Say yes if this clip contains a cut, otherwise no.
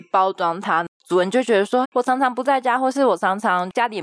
yes